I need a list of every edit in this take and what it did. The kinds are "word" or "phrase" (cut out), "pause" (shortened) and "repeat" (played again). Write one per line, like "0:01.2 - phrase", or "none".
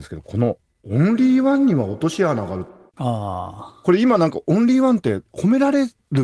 0:02.9 - pause